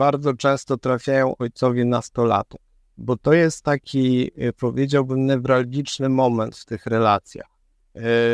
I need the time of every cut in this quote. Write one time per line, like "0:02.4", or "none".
0:03.0